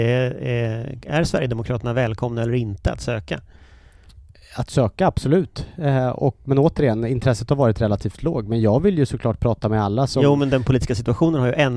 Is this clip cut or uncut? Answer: uncut